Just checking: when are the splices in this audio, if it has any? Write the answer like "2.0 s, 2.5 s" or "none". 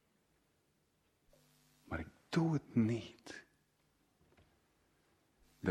none